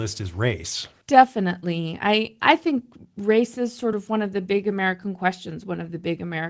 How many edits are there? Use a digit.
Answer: 0